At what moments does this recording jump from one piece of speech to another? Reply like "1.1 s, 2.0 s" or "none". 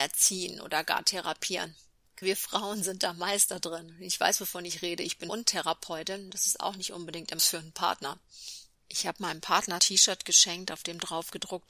2.2 s, 5.3 s, 7.4 s, 8.8 s, 9.8 s